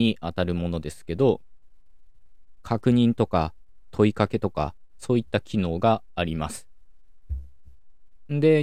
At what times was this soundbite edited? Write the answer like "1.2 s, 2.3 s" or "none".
5.0 s